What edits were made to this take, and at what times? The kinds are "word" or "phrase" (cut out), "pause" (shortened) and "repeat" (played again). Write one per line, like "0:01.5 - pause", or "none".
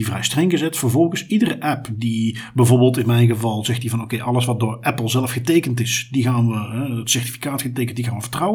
none